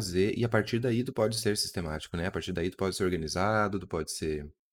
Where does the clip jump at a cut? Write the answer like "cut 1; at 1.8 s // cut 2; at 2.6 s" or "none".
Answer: none